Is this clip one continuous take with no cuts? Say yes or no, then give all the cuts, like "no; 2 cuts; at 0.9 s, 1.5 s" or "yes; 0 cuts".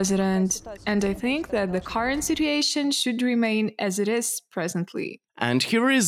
yes; 0 cuts